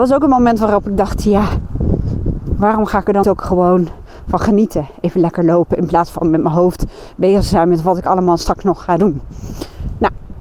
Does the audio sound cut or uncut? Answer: cut